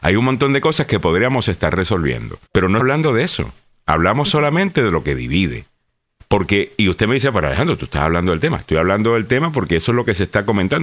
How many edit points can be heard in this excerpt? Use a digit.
2